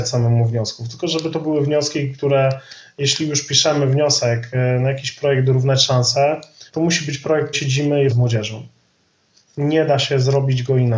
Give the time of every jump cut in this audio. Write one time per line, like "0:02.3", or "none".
0:06.7
0:07.5
0:08.1